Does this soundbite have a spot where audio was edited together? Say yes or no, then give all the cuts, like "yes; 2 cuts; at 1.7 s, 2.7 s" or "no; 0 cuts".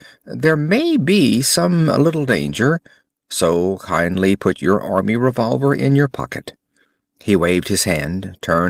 no; 0 cuts